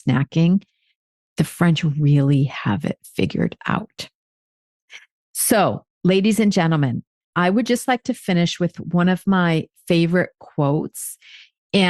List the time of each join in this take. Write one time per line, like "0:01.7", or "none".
none